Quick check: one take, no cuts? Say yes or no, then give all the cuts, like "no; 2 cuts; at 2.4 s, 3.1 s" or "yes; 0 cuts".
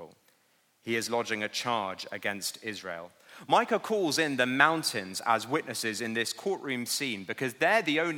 yes; 0 cuts